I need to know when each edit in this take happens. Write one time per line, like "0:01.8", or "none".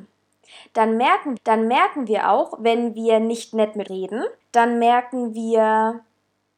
0:01.4
0:03.9
0:04.4